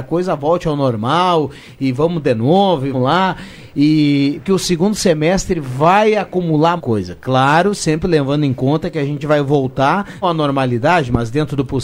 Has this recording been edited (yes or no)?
yes